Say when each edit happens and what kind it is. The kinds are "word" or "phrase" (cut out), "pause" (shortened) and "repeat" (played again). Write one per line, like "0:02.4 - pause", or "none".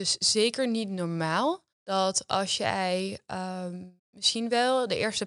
0:01.7 - pause
0:04.0 - pause